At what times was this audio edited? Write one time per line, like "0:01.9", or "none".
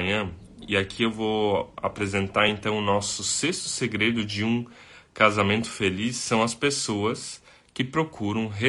none